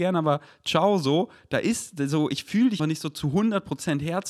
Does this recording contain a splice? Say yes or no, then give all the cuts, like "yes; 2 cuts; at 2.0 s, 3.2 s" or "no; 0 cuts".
yes; 1 cut; at 2.8 s